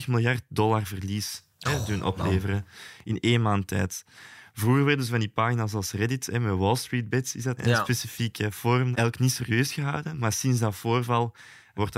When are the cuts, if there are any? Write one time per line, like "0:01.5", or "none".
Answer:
0:07.6
0:08.9